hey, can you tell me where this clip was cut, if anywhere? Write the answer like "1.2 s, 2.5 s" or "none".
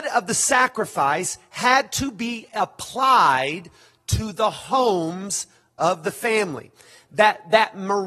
none